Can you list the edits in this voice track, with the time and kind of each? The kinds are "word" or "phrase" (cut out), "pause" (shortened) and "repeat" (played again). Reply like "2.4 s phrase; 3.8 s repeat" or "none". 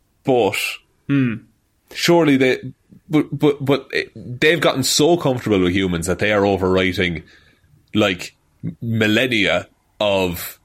none